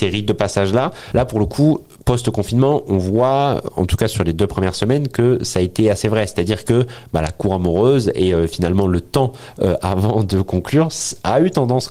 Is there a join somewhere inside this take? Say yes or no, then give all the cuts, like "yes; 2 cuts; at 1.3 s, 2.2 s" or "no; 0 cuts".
no; 0 cuts